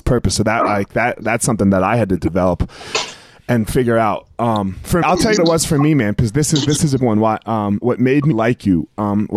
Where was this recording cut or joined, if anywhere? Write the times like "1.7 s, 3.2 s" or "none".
5.0 s, 5.4 s, 7.0 s, 7.8 s, 8.3 s